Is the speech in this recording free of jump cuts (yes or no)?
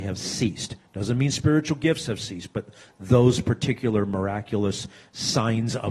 yes